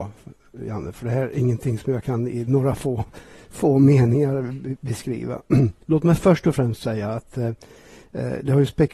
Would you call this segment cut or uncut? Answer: cut